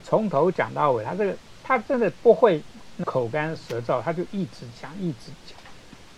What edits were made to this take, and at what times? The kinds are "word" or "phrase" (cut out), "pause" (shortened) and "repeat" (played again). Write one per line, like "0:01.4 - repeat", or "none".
0:03.0 - word